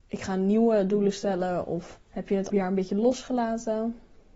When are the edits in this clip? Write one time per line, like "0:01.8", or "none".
0:02.0
0:02.5